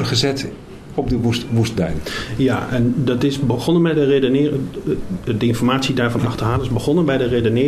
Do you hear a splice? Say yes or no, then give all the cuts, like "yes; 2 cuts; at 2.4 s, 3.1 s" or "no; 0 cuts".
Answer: no; 0 cuts